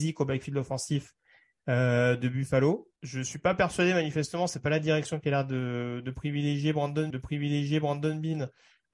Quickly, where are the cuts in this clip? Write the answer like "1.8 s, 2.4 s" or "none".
3.0 s, 7.1 s